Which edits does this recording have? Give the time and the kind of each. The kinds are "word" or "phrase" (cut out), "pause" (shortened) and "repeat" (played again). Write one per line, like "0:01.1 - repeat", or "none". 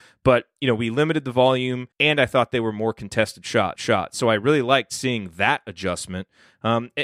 0:01.9 - pause
0:03.8 - repeat